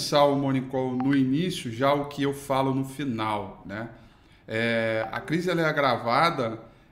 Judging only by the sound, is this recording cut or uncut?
uncut